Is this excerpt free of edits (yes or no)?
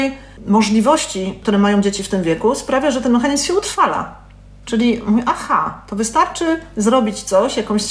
yes